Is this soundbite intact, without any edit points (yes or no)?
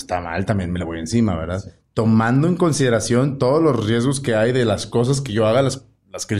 yes